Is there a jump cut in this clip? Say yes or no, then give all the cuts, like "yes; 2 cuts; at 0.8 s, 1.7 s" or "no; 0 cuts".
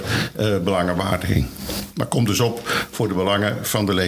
no; 0 cuts